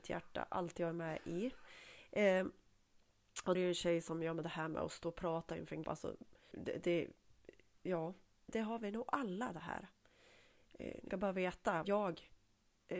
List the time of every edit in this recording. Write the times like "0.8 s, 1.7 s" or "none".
3.5 s, 5.8 s, 6.5 s, 8.5 s, 11.1 s, 11.8 s

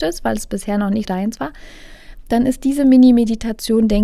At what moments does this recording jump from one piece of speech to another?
1.0 s

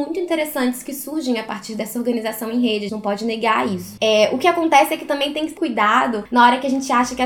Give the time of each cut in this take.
2.9 s, 5.6 s

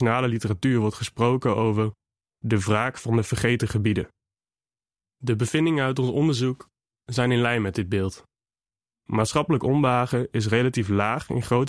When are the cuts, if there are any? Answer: none

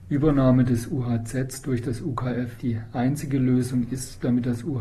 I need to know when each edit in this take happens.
2.6 s

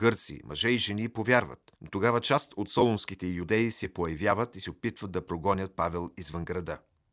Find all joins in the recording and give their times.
1.8 s

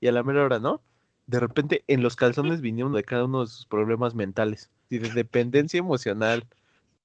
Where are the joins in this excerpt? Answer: 2.9 s, 4.9 s

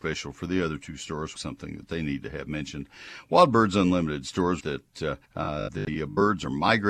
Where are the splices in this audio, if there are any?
1.4 s, 4.6 s, 5.2 s

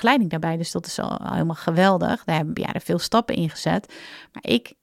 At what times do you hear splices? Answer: 2.6 s

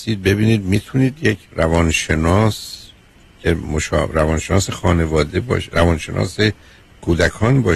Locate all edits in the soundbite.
1.4 s

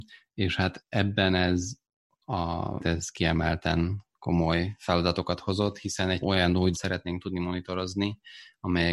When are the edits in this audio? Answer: 2.8 s, 6.2 s, 6.7 s

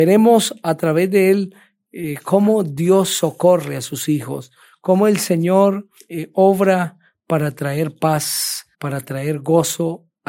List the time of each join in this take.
6.0 s, 8.7 s

